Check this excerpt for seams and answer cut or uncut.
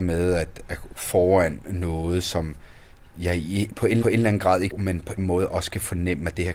cut